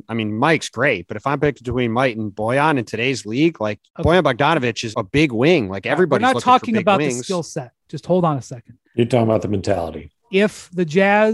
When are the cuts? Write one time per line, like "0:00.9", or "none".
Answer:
0:03.9
0:04.9
0:08.8
0:10.2